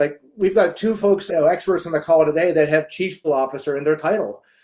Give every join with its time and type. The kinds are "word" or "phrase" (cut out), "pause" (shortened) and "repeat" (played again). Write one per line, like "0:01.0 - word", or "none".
0:01.3 - word
0:03.2 - word